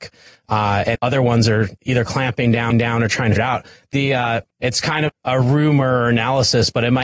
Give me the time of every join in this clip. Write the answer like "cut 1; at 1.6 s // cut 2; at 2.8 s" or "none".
cut 1; at 0.9 s // cut 2; at 1.8 s // cut 3; at 2.7 s // cut 4; at 3.4 s // cut 5; at 4.5 s // cut 6; at 5.1 s